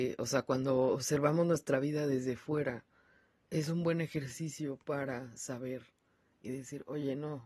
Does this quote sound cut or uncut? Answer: uncut